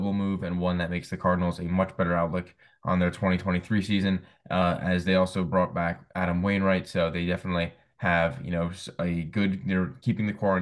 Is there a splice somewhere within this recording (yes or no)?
no